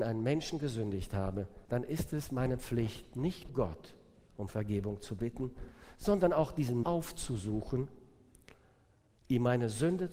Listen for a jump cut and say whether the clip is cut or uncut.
cut